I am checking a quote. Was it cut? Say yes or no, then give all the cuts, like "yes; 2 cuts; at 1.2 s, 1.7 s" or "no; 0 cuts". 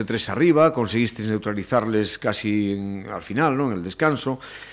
no; 0 cuts